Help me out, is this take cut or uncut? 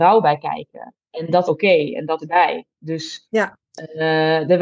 cut